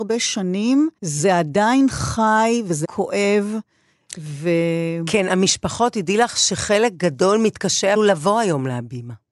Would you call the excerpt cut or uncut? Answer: cut